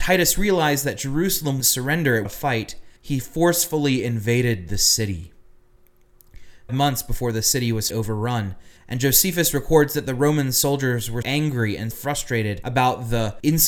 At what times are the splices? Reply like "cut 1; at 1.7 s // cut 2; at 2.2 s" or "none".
cut 1; at 1.6 s // cut 2; at 2.2 s // cut 3; at 3.0 s // cut 4; at 6.7 s // cut 5; at 7.9 s // cut 6; at 8.8 s // cut 7; at 11.2 s // cut 8; at 11.9 s